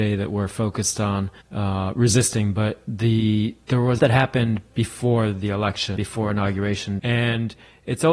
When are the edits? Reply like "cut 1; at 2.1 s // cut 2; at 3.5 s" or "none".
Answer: cut 1; at 1.4 s // cut 2; at 4.0 s // cut 3; at 6.0 s // cut 4; at 7.0 s